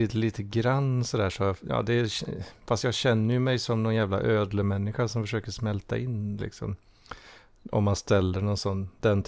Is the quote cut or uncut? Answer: uncut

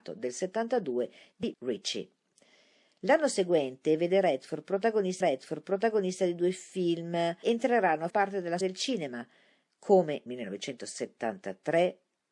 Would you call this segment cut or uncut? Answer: cut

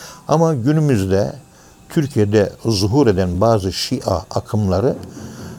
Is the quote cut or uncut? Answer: uncut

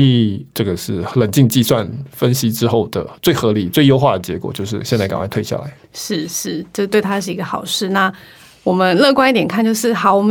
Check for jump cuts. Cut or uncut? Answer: uncut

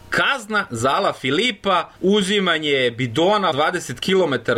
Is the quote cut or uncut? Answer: cut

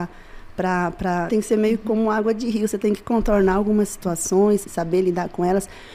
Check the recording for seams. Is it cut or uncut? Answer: cut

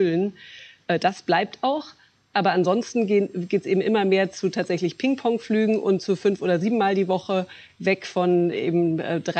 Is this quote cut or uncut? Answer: uncut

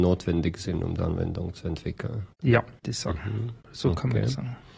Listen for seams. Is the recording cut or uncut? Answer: cut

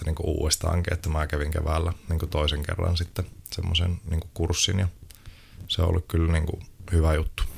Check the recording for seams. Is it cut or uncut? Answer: uncut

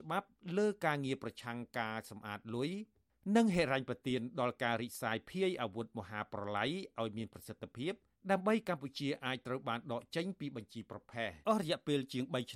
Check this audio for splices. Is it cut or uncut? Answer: cut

